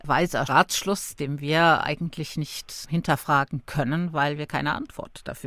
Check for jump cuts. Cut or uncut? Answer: uncut